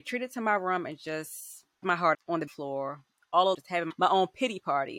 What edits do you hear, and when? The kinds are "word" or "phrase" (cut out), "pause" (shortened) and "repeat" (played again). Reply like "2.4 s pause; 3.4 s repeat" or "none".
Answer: 1.8 s word; 2.1 s word; 2.5 s word; 3.5 s word